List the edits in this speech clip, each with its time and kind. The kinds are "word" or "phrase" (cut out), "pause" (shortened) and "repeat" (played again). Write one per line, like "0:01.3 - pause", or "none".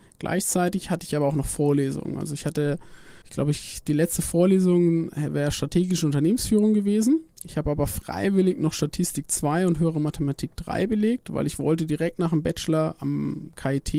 0:03.2 - pause